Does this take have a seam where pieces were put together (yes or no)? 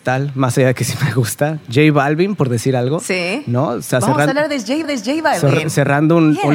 yes